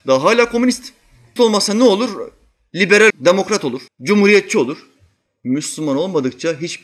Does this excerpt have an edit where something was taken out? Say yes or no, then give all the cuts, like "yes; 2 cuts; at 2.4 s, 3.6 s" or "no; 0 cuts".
yes; 3 cuts; at 1.4 s, 3.1 s, 3.9 s